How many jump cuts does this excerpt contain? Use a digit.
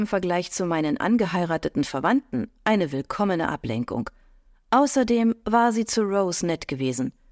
0